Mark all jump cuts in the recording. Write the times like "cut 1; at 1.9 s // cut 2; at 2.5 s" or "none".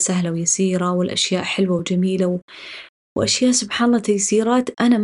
none